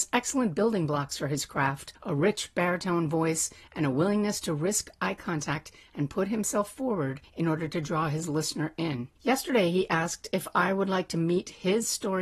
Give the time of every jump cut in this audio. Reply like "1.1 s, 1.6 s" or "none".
9.2 s